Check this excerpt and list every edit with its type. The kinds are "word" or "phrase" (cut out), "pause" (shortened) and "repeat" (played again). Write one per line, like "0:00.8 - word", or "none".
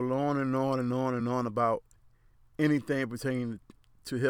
none